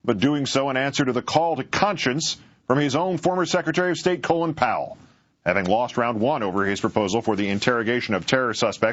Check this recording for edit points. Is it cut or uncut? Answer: uncut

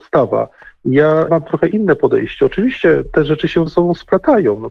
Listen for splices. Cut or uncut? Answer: cut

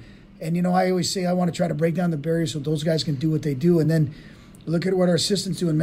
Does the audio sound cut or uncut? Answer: uncut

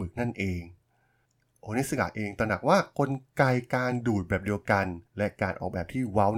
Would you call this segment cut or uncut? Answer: cut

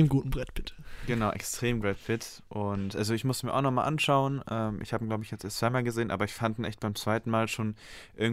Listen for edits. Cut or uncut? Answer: cut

